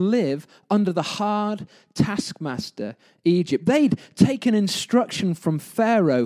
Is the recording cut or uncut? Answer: uncut